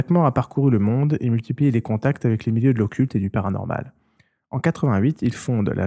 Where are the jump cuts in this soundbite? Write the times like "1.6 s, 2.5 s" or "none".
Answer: none

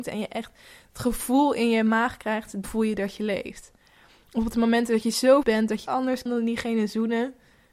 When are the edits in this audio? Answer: 2.6 s, 5.4 s, 5.9 s, 6.3 s

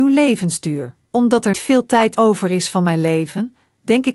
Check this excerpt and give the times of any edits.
1.1 s, 1.5 s, 2.1 s

